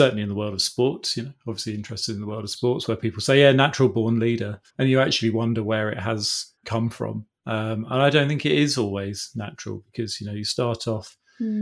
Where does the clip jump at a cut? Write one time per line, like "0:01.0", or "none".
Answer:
0:04.7
0:06.6